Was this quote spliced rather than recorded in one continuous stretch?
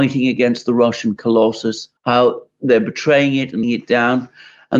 yes; 2 cuts; at 2.0 s, 3.6 s

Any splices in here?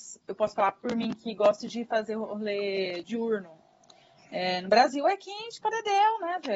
no; 0 cuts

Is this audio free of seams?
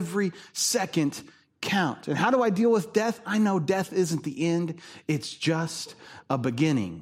yes; 0 cuts

